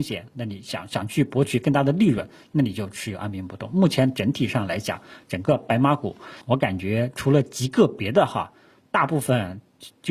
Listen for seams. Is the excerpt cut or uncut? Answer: cut